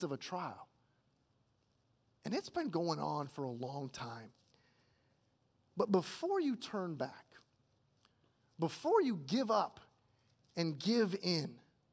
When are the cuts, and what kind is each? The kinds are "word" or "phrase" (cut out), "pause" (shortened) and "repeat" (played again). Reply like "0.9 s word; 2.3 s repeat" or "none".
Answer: none